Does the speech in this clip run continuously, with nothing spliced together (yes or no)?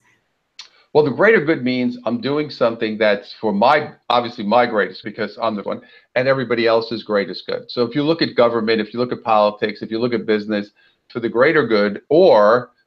no